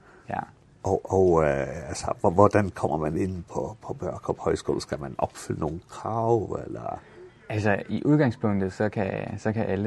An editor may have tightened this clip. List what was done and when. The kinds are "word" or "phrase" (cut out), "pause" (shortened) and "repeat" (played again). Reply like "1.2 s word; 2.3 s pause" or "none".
none